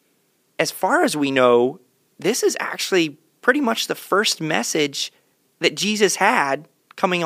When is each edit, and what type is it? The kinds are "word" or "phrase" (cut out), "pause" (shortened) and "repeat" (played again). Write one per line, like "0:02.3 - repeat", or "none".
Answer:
none